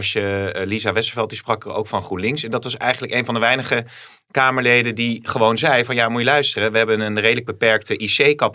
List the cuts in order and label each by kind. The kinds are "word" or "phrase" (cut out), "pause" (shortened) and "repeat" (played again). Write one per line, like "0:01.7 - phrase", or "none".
none